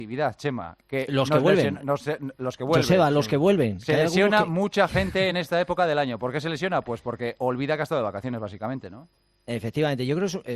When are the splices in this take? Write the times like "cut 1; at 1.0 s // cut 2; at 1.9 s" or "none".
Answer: none

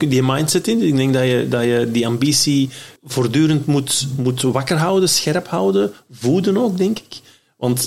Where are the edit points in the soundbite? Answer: cut 1; at 3.0 s

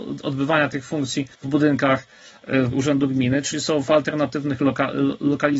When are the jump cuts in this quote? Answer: cut 1; at 1.3 s // cut 2; at 2.7 s

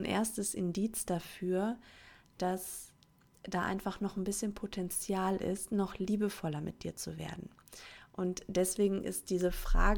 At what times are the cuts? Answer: none

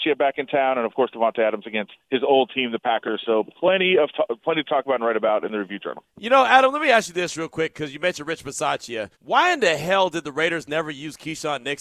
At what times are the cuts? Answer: cut 1; at 2.0 s // cut 2; at 6.1 s // cut 3; at 9.2 s

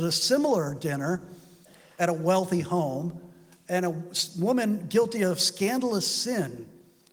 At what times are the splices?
none

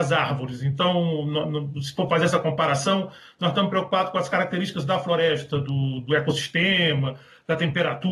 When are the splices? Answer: none

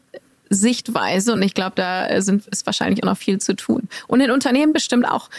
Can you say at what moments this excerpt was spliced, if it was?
none

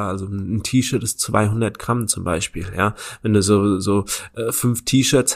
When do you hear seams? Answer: none

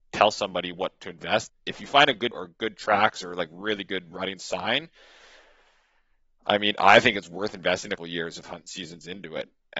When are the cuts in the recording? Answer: cut 1; at 1.5 s // cut 2; at 2.3 s // cut 3; at 8.0 s

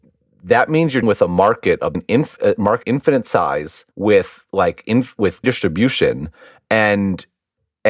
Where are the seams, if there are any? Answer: cut 1; at 1.0 s // cut 2; at 1.9 s // cut 3; at 2.8 s // cut 4; at 3.9 s // cut 5; at 5.4 s

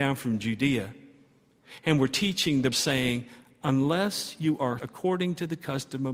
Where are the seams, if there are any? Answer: cut 1; at 2.7 s // cut 2; at 4.8 s

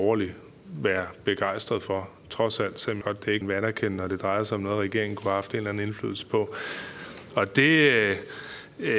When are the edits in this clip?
cut 1; at 3.0 s // cut 2; at 3.4 s

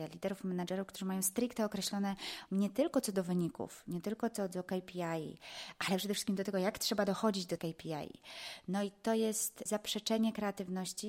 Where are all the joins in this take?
cut 1; at 2.5 s // cut 2; at 7.6 s // cut 3; at 9.7 s

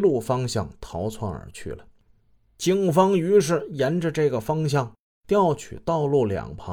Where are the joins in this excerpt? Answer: none

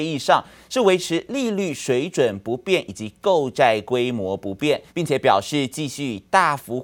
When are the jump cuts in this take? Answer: cut 1; at 4.9 s

